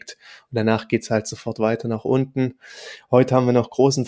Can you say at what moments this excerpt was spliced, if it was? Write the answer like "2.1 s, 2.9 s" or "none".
none